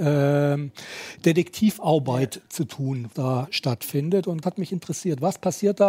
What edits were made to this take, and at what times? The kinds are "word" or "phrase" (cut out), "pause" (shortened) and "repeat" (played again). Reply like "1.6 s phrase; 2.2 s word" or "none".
3.1 s word; 4.4 s phrase